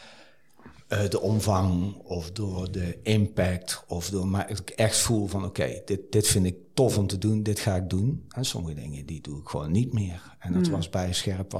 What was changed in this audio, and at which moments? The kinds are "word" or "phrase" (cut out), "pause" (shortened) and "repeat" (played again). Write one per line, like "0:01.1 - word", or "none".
none

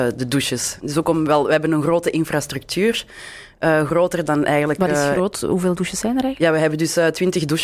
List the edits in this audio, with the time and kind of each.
none

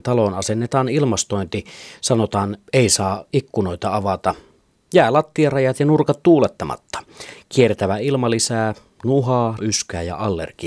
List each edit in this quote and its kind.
0:09.6 - word

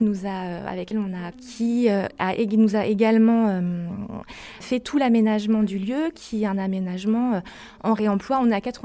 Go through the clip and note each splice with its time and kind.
0:00.9 - word
0:01.3 - word

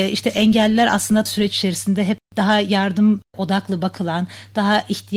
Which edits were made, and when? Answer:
0:01.3 - word

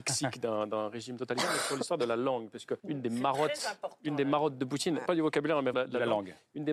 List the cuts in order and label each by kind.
0:02.8 - pause
0:05.1 - phrase
0:05.7 - word

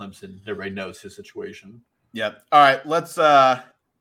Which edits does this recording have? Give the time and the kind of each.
none

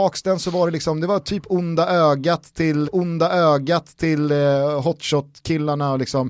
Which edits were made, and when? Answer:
0:02.8 - repeat

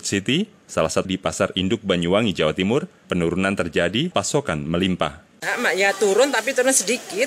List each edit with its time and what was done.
0:01.0 - word
0:04.1 - word

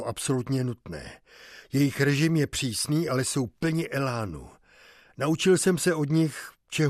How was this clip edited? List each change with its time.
none

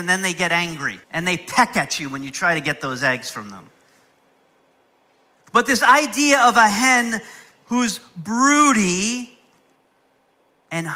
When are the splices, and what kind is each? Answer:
0:01.0 - pause

